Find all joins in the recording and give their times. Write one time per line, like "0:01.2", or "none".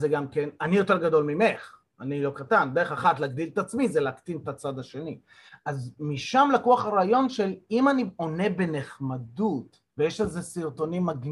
0:09.9